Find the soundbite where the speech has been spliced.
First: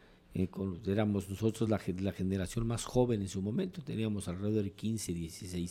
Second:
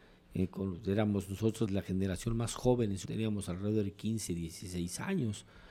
second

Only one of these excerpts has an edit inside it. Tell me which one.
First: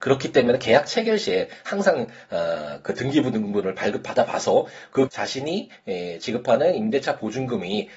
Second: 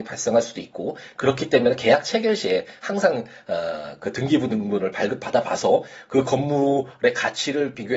first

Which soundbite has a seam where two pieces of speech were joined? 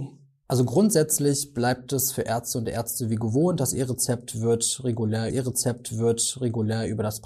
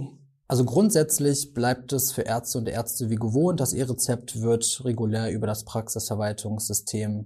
first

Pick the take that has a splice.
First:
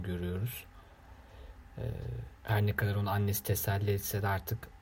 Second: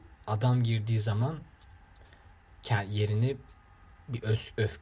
first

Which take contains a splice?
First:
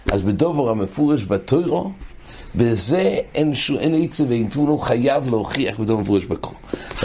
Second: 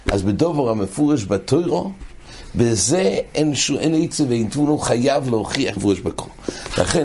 second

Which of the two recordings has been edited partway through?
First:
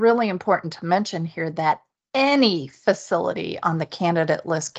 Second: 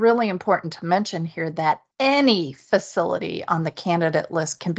second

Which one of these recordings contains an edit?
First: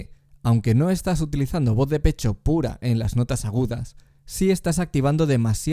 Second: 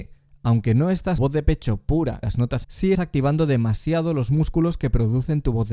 second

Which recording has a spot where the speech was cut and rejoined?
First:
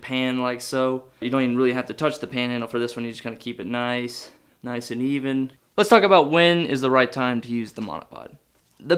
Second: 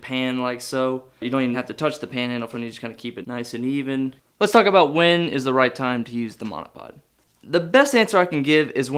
second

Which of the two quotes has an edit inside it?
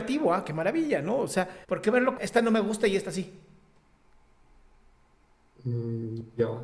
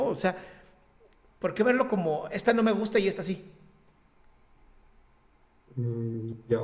first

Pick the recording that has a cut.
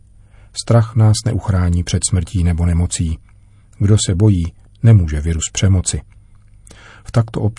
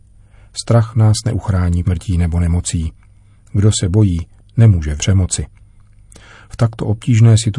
second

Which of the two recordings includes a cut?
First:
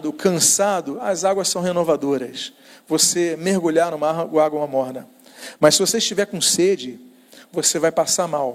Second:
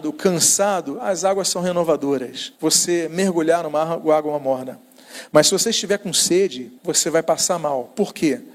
second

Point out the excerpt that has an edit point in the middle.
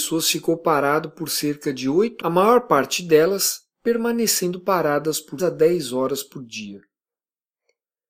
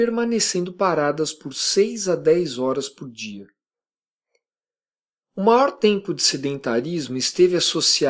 first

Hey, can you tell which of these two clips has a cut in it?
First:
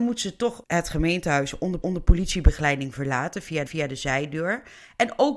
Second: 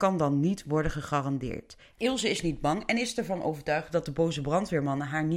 first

